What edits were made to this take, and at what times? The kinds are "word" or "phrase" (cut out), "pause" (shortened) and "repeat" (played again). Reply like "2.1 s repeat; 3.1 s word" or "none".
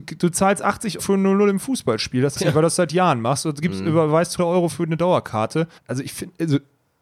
1.0 s word; 2.4 s word; 4.4 s word; 5.8 s pause